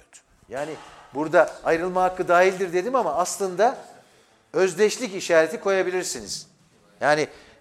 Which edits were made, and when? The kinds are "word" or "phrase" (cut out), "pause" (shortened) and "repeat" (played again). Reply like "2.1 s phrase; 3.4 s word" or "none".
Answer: none